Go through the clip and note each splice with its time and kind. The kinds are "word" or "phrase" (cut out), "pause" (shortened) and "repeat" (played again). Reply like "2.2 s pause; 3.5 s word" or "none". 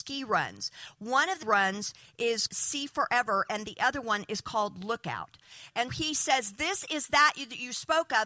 1.4 s word; 2.5 s word; 5.9 s word